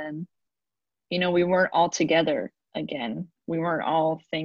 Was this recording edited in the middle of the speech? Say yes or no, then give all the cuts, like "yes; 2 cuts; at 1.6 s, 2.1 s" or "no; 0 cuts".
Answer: no; 0 cuts